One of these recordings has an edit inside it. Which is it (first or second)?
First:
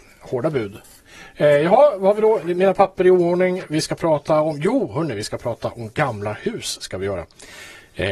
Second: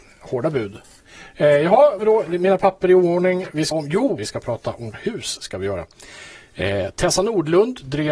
second